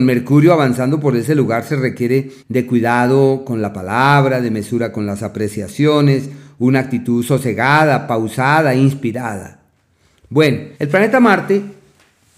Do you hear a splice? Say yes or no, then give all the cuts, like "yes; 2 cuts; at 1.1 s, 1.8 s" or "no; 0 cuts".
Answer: yes; 2 cuts; at 2.4 s, 10.7 s